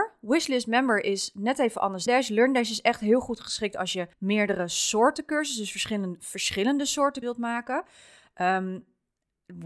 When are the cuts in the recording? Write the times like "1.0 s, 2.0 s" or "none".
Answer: 2.1 s, 4.1 s, 7.2 s